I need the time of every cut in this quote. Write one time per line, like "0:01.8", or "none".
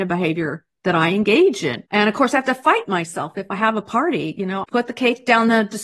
0:01.9
0:04.6

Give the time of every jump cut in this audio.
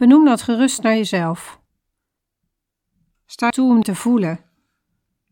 0:03.5
0:03.8

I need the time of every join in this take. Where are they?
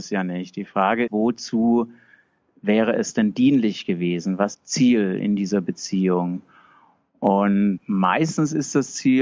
0:01.1
0:04.5

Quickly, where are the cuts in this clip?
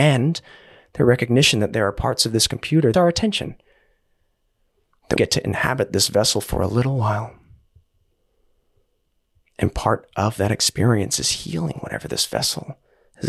0:02.9
0:05.2

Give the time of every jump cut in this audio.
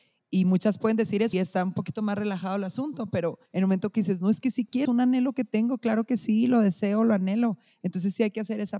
0:01.3
0:03.5
0:04.8

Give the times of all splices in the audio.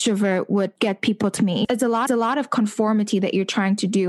0:01.4
0:02.1

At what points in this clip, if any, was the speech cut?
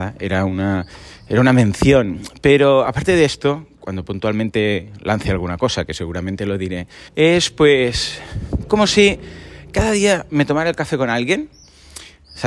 0:07.1

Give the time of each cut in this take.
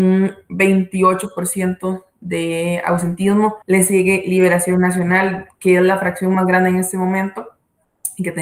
0:03.6

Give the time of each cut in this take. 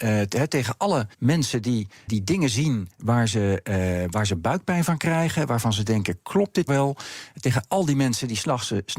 0:01.1
0:02.1
0:02.9
0:06.7

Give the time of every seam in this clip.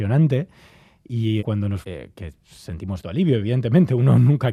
0:01.4
0:01.8
0:03.0

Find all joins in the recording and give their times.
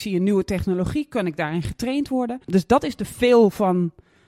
0:02.4

